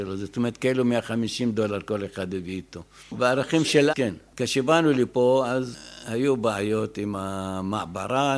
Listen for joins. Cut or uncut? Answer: cut